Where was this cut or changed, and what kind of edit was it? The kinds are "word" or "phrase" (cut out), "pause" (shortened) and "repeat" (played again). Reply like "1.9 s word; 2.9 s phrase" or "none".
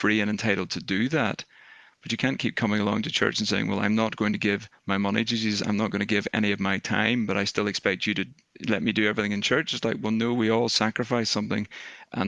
none